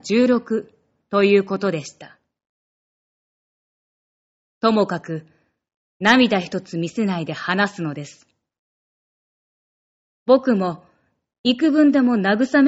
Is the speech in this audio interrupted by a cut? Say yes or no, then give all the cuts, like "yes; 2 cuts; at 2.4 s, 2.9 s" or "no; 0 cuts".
no; 0 cuts